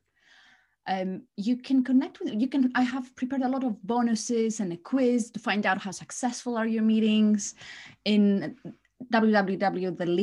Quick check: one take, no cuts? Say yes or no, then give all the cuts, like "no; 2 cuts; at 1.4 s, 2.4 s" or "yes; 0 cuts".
no; 1 cut; at 1.3 s